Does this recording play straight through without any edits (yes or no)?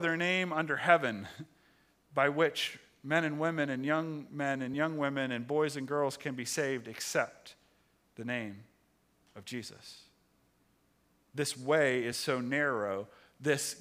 yes